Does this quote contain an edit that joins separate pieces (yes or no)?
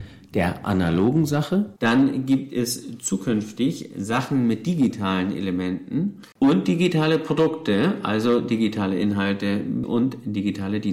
yes